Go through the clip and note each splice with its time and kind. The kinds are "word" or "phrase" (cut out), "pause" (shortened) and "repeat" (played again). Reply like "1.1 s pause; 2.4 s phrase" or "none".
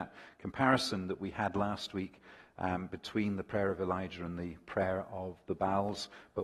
none